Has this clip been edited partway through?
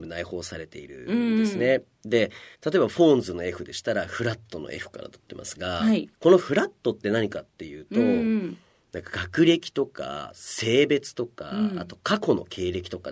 yes; 2 cuts; at 2.5 s, 6.1 s

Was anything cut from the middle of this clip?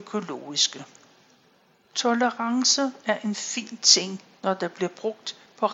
no; 0 cuts

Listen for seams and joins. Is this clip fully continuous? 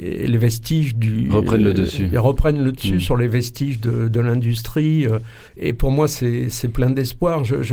no; 1 cut; at 5.5 s

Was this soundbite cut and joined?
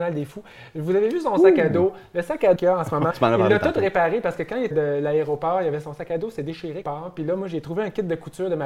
yes; 4 cuts; at 2.6 s, 3.1 s, 4.7 s, 6.8 s

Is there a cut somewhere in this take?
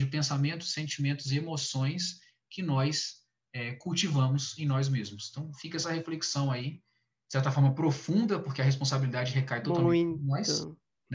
no; 0 cuts

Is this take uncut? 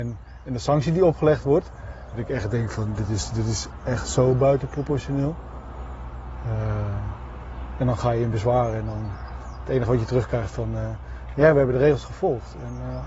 yes; 0 cuts

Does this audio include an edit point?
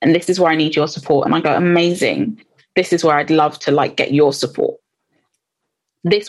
no; 0 cuts

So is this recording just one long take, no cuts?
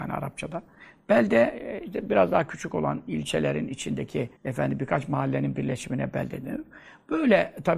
no; 1 cut; at 4.4 s

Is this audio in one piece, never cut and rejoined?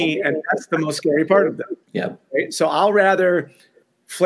no; 1 cut; at 1.8 s

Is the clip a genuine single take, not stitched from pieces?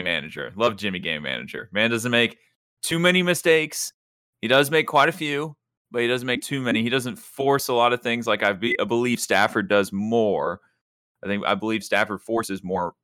yes; 0 cuts

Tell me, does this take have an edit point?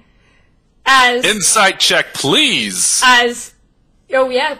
no; 0 cuts

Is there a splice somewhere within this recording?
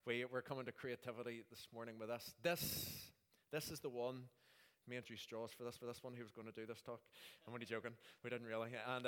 yes; 2 cuts; at 5.0 s, 5.8 s

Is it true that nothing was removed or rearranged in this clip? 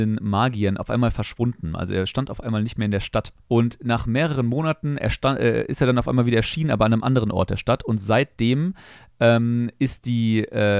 no; 1 cut; at 3.4 s

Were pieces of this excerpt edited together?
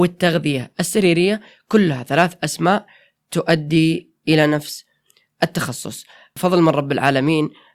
no; 0 cuts

